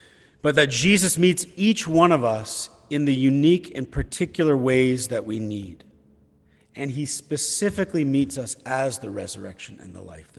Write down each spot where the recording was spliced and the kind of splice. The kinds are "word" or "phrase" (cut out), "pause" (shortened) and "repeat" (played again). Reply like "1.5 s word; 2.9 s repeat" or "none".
none